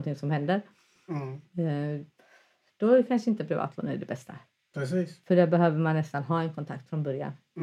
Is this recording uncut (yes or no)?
yes